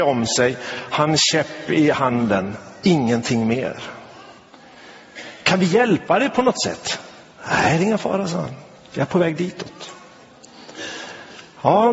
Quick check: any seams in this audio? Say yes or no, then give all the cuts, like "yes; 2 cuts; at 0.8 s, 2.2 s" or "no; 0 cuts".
no; 0 cuts